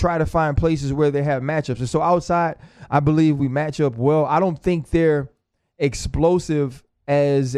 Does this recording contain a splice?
no; 0 cuts

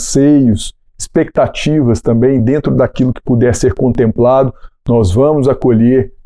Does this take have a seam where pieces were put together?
no; 0 cuts

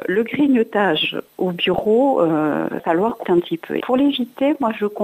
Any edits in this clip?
yes; 3 cuts; at 2.8 s, 3.2 s, 3.8 s

